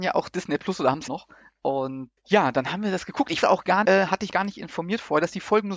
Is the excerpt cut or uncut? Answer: cut